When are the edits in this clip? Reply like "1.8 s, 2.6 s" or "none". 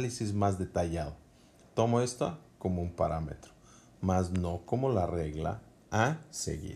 none